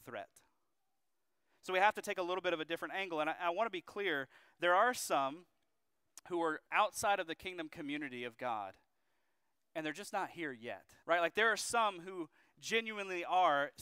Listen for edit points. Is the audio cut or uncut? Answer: cut